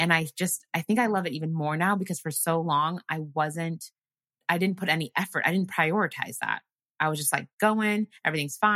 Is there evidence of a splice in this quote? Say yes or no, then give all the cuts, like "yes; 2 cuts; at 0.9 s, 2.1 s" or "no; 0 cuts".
no; 0 cuts